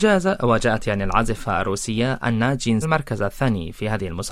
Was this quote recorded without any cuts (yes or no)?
no